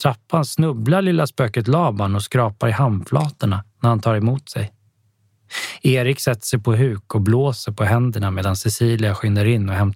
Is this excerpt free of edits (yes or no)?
no